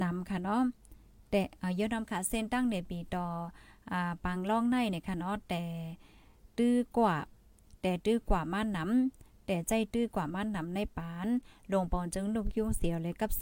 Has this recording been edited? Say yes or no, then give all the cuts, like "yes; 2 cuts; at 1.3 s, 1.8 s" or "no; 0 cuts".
no; 0 cuts